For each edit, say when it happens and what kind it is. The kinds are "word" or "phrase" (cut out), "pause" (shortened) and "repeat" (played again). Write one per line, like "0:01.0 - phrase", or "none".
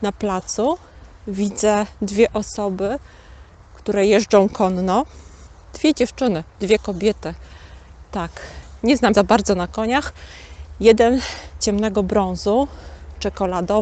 0:09.1 - word
0:11.6 - phrase